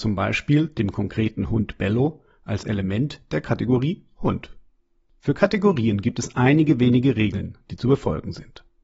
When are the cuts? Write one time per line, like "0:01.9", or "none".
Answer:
none